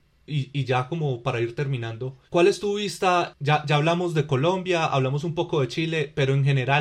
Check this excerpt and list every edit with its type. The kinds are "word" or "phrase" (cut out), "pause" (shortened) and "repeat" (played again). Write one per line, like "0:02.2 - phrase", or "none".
0:02.3 - pause